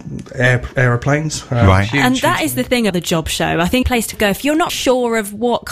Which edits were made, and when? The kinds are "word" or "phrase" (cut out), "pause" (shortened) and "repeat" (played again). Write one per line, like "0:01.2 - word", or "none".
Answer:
0:02.9 - word
0:03.8 - phrase
0:04.1 - word
0:04.7 - word

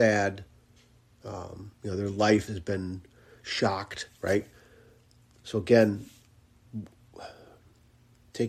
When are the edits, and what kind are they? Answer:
0:01.7 - pause
0:02.5 - word

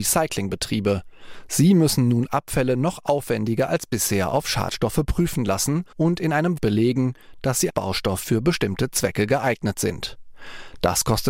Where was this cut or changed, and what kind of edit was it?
0:05.9 - pause
0:06.6 - phrase
0:07.7 - word

